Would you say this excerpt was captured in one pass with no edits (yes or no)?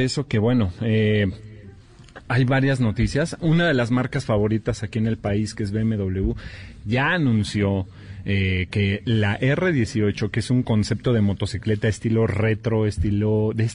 yes